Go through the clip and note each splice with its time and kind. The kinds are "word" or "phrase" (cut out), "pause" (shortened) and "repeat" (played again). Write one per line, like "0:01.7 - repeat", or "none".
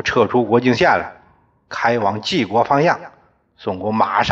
none